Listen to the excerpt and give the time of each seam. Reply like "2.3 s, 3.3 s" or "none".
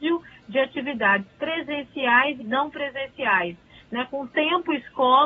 2.4 s

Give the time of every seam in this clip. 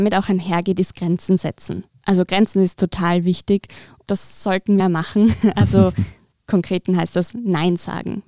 2.5 s, 4.8 s

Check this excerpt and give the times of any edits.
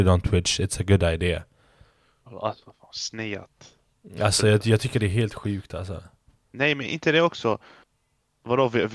none

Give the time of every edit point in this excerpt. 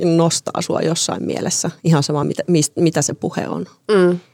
none

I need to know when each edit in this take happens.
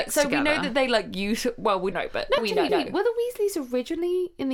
1.9 s, 2.4 s, 2.7 s

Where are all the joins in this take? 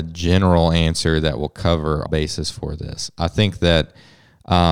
2.1 s

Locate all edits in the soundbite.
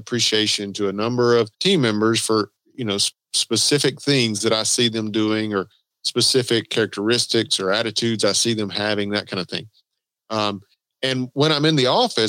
1.5 s

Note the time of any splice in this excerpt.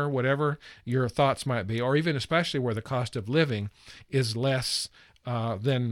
none

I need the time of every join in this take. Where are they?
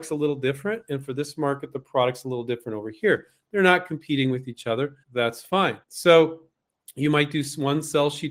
5.0 s, 5.8 s

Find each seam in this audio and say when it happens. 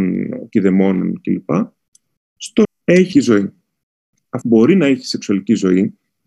2.6 s, 3.1 s, 4.4 s

